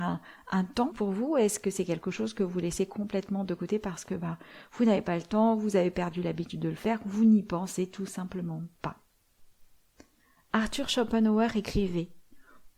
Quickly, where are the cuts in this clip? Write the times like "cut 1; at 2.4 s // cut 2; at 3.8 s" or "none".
cut 1; at 0.9 s